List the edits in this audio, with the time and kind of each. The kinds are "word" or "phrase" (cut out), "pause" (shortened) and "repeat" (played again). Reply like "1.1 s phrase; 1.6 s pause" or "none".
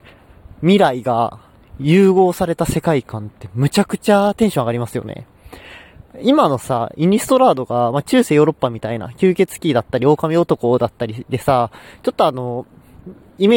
none